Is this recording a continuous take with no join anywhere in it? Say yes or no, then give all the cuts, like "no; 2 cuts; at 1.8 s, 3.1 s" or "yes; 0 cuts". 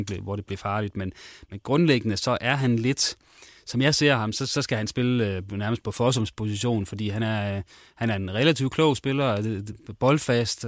yes; 0 cuts